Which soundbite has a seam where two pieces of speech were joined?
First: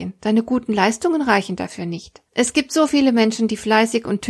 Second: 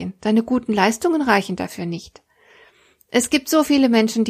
first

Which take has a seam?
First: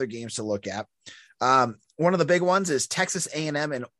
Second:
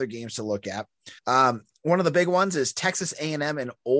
second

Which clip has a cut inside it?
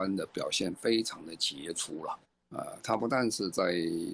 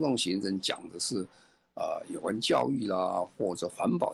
first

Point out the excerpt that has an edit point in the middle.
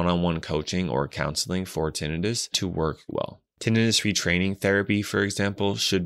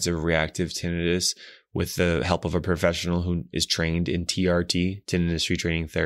first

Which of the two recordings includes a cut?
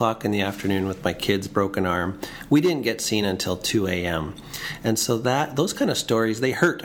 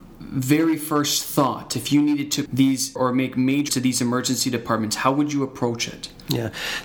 second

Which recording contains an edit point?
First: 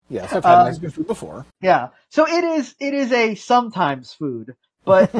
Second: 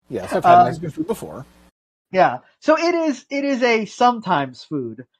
first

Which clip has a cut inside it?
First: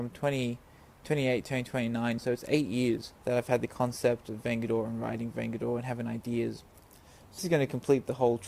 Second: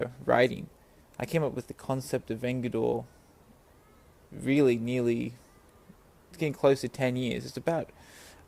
first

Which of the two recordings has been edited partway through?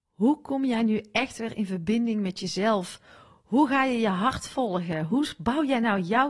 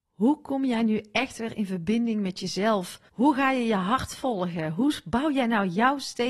second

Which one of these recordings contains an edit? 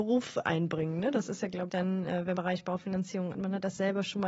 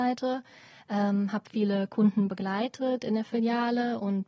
first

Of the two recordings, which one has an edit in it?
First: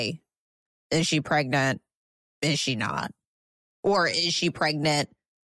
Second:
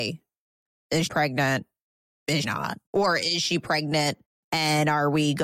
second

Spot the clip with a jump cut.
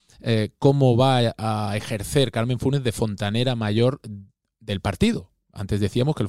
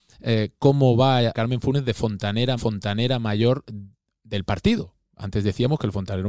second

